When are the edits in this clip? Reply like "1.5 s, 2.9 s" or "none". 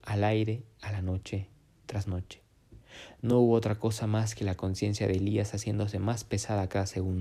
none